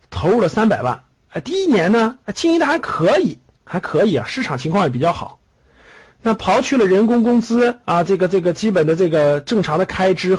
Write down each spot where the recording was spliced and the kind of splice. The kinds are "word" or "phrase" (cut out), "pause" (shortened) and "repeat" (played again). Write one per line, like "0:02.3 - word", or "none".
0:02.2 - pause
0:07.8 - pause

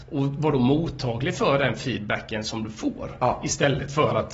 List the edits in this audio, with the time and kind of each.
none

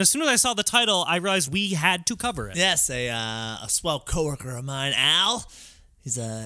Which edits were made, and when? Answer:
none

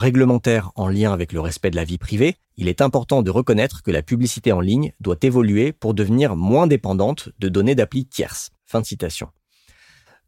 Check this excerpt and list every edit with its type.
0:02.4 - pause
0:08.6 - pause

